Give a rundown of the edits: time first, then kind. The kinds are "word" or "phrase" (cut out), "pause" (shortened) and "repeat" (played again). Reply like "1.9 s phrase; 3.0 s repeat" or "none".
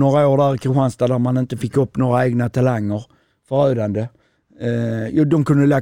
none

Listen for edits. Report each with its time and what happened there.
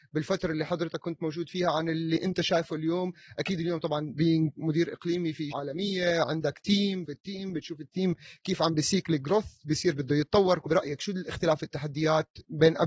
5.5 s word; 7.0 s word; 10.7 s phrase

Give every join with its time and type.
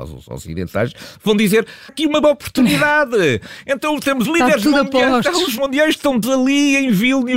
1.9 s word; 2.2 s word; 4.2 s word; 5.6 s word; 6.2 s word

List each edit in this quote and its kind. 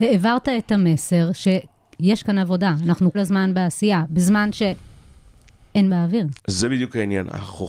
2.2 s phrase; 3.1 s word; 5.9 s word; 6.4 s pause

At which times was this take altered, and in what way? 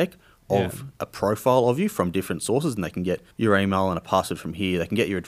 3.3 s pause

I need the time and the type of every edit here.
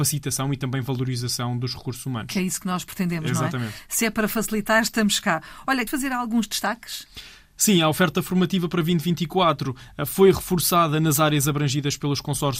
5.9 s word

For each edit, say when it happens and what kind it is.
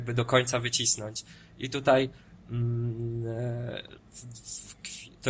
4.0 s pause

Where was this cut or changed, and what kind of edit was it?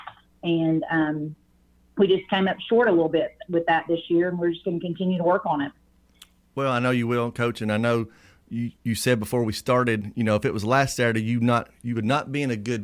none

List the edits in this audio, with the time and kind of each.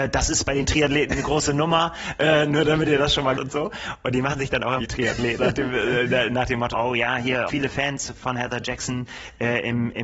3.3 s phrase; 4.8 s phrase; 5.4 s word; 6.7 s word; 7.5 s word

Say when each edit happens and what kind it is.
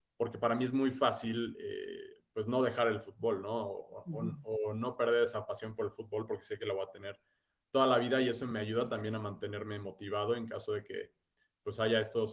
none

